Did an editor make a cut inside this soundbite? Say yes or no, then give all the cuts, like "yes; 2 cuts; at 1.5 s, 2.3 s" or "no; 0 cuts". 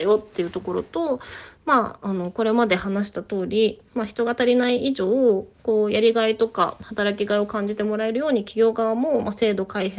yes; 2 cuts; at 3.9 s, 5.5 s